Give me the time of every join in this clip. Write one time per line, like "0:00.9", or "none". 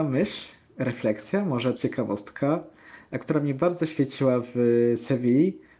0:01.8